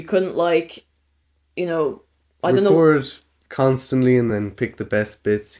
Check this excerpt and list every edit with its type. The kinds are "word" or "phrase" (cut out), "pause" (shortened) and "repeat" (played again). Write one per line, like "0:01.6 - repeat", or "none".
none